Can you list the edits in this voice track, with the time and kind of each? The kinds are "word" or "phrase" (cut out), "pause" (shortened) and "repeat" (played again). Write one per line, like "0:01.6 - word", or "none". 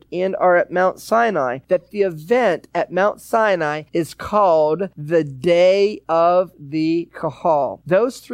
none